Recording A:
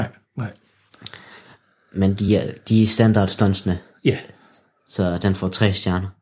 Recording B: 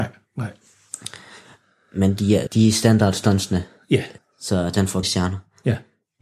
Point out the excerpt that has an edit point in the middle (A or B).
B